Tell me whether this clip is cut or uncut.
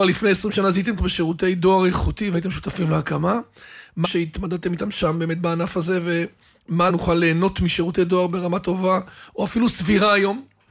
cut